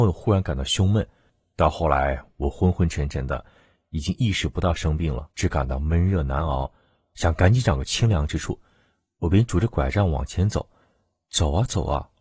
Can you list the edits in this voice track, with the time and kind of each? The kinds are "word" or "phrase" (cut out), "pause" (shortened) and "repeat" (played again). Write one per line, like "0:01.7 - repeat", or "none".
0:05.3 - pause